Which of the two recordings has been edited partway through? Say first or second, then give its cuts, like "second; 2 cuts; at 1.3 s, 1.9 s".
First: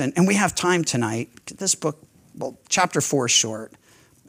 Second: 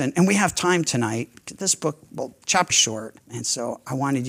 second; 3 cuts; at 2.1 s, 2.7 s, 3.2 s